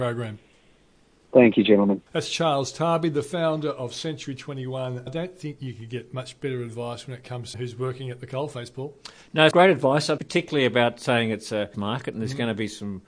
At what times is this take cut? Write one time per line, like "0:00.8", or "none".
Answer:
0:02.1
0:05.1
0:07.5
0:09.5
0:10.2
0:11.7